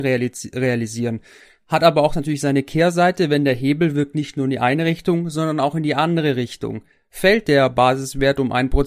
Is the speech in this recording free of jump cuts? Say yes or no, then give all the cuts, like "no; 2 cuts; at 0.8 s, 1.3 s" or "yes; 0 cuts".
yes; 0 cuts